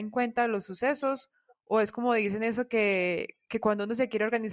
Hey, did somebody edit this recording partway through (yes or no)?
no